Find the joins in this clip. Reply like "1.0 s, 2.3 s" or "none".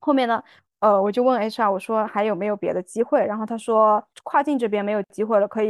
4.1 s